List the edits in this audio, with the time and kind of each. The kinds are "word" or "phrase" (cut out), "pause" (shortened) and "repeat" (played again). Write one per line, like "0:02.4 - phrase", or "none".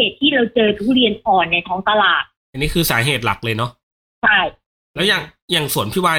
none